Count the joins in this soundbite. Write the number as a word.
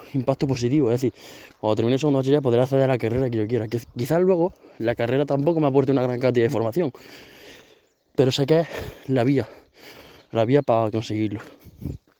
zero